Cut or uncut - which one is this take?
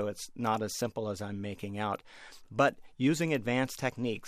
uncut